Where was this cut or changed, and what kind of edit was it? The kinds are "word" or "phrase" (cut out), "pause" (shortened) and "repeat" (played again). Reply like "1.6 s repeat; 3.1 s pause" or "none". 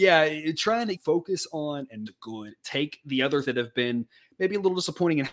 1.0 s word; 2.1 s word; 3.4 s word